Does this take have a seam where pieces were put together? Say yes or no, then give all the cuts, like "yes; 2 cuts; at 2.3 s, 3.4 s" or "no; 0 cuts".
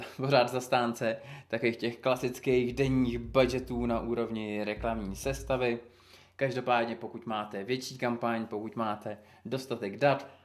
no; 0 cuts